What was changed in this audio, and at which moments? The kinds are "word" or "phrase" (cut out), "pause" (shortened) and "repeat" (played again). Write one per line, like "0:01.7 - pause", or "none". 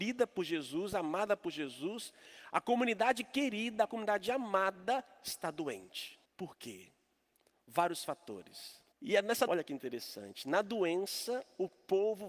0:06.2 - pause
0:08.9 - pause
0:09.5 - word